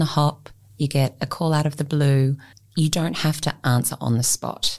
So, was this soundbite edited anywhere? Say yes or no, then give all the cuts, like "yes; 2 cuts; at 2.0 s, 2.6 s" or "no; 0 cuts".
yes; 1 cut; at 2.5 s